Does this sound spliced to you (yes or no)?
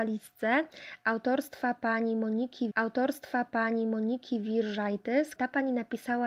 yes